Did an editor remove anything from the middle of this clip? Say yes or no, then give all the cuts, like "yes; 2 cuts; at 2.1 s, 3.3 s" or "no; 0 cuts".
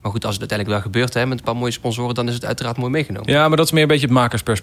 no; 0 cuts